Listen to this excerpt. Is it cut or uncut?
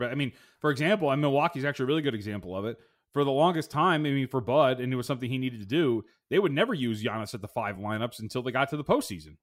uncut